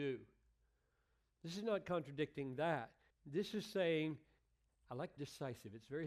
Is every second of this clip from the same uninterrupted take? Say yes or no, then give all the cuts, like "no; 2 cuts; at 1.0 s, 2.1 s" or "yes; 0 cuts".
no; 3 cuts; at 3.1 s, 4.4 s, 5.2 s